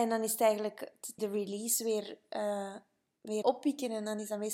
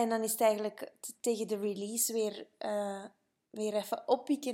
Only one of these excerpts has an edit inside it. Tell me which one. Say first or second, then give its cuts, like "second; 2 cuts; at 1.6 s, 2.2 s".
first; 2 cuts; at 1.2 s, 3.4 s